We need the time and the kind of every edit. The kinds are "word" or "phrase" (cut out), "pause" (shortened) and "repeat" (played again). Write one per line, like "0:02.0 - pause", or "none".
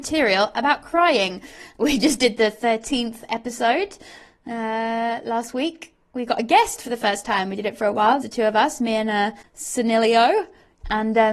0:01.8 - word
0:08.2 - word